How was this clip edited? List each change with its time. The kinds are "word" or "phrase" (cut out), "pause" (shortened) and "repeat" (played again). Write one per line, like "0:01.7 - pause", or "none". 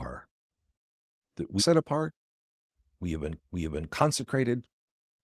0:01.6 - word
0:03.4 - repeat